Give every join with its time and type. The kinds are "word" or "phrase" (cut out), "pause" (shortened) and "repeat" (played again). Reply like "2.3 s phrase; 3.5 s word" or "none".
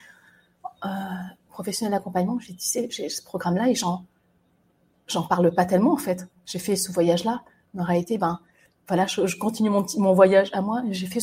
none